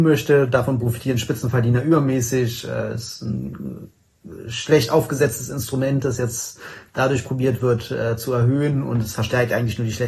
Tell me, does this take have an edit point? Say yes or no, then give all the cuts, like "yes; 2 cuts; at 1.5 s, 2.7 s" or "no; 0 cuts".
no; 0 cuts